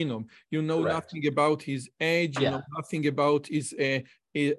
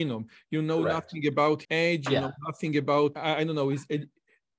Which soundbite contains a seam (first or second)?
second